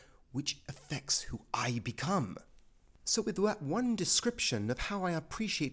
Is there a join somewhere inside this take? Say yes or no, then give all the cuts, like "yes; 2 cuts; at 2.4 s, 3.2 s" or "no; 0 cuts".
no; 0 cuts